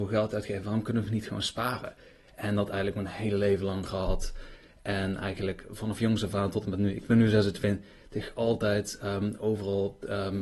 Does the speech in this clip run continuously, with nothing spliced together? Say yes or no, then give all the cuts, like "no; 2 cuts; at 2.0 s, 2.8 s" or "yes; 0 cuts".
yes; 0 cuts